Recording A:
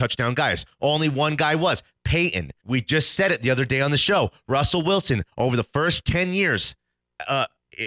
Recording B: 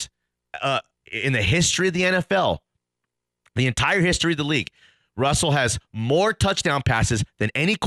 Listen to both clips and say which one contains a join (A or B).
A